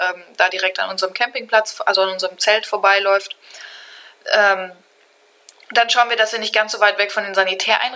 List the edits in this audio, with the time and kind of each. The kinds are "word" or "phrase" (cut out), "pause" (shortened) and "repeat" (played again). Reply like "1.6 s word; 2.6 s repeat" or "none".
none